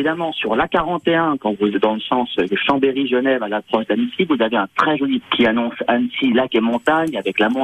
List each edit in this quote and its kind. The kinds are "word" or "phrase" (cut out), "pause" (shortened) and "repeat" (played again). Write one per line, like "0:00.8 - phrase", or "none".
0:01.7 - word
0:05.2 - word

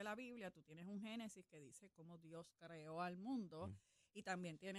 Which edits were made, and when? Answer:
0:01.9 - word

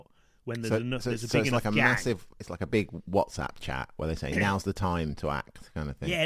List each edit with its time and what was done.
none

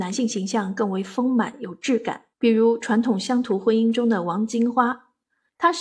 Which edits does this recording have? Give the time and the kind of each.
0:02.3 - pause

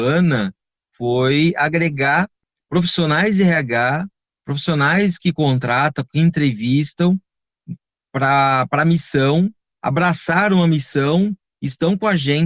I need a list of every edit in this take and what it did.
none

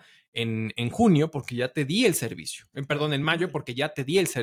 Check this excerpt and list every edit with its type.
none

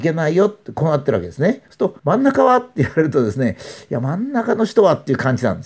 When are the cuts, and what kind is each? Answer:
0:01.6 - pause
0:02.0 - pause

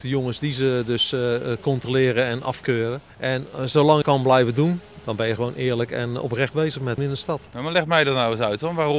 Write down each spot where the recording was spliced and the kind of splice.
0:03.1 - pause
0:04.0 - phrase
0:07.0 - phrase
0:07.5 - pause

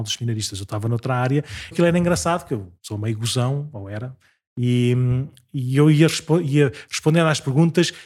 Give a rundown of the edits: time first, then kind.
0:01.7 - word
0:02.8 - pause

